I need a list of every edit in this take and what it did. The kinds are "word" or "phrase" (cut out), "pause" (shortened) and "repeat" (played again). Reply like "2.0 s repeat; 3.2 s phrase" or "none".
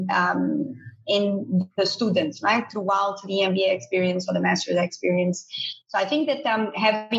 none